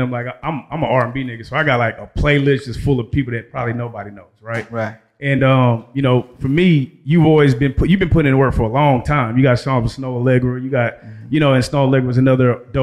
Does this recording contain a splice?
no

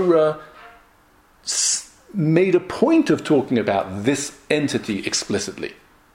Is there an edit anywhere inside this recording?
no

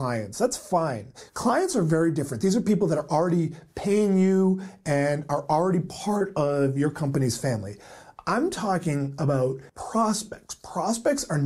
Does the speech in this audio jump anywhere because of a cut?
yes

